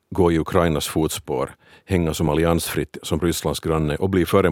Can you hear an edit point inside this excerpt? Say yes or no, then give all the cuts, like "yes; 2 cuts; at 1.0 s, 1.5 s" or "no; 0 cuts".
no; 0 cuts